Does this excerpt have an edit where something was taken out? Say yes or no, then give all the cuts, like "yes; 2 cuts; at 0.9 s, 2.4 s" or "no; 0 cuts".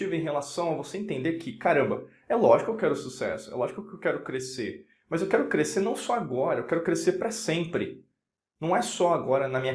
no; 0 cuts